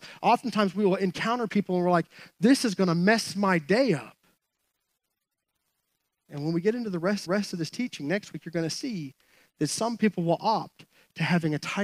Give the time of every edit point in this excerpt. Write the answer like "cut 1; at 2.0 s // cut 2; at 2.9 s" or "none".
cut 1; at 7.3 s